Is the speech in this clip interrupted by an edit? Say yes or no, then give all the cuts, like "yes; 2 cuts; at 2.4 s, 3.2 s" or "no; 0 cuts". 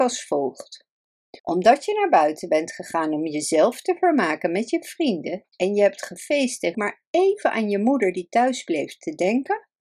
yes; 3 cuts; at 1.4 s, 5.5 s, 6.7 s